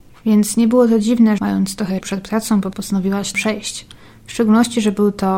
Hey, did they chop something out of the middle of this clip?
yes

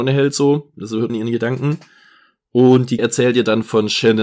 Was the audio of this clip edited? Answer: yes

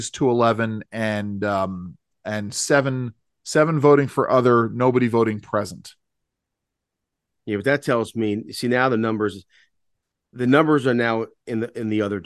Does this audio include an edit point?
no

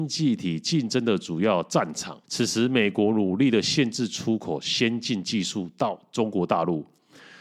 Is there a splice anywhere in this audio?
yes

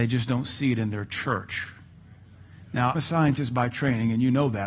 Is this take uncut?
no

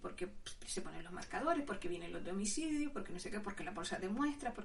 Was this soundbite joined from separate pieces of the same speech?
no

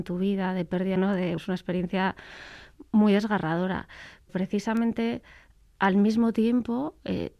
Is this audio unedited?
no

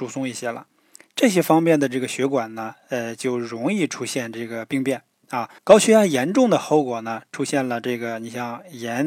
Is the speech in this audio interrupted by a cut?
yes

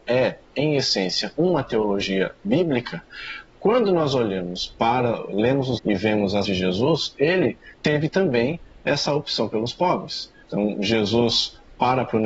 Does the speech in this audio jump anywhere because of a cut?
yes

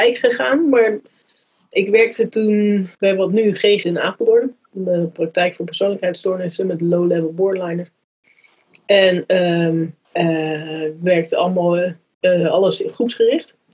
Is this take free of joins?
no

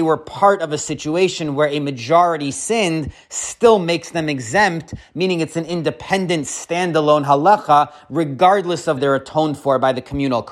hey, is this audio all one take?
no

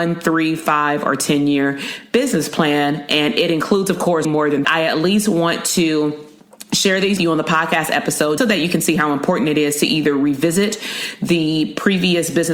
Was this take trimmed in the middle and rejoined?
yes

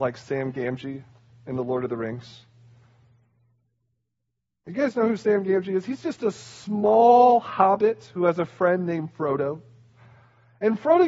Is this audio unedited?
yes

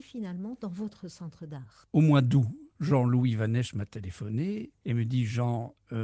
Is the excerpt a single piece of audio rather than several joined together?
no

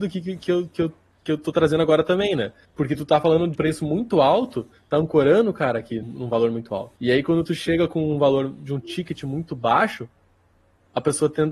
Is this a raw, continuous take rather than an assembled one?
no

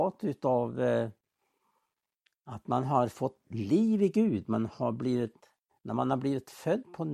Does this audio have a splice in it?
no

